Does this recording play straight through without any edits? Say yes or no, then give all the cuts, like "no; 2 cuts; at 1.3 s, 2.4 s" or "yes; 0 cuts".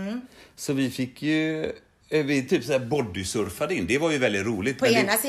yes; 0 cuts